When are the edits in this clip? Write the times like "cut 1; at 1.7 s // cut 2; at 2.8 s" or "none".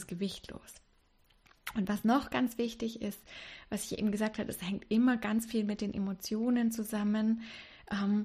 none